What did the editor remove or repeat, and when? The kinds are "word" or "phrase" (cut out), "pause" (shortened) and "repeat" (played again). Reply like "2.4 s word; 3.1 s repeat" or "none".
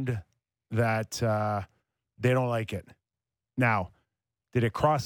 none